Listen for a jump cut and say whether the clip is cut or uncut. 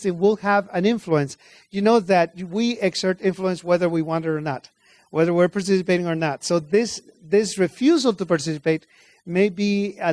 uncut